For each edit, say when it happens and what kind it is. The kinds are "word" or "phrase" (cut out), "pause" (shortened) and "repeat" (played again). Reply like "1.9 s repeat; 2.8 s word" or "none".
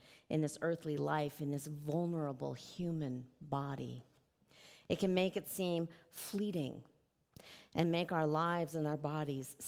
none